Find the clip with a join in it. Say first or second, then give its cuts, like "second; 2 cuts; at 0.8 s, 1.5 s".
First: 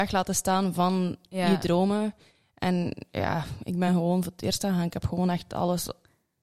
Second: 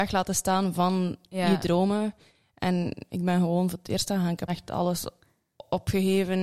second; 2 cuts; at 3.1 s, 4.5 s